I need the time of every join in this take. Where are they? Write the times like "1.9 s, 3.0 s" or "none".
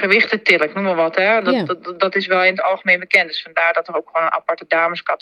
none

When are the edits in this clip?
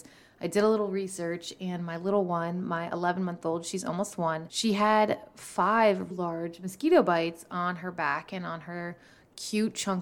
6.1 s

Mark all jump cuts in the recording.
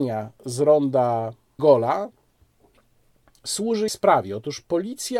1.6 s, 3.9 s

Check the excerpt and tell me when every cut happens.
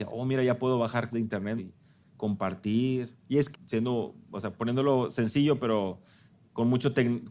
1.1 s, 1.6 s, 3.2 s, 3.5 s, 4.6 s

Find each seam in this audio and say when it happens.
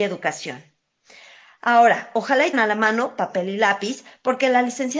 2.5 s

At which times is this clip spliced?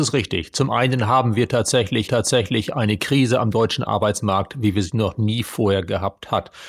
2.1 s

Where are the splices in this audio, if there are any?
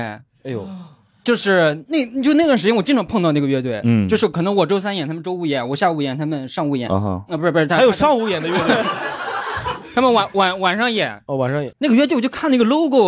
11.7 s

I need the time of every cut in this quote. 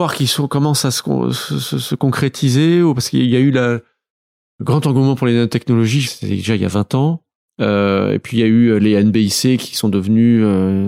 6.0 s

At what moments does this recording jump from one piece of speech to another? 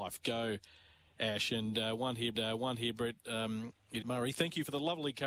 2.3 s, 4.0 s

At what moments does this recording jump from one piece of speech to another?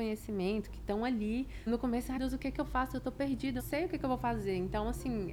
1.7 s, 2.2 s, 3.6 s

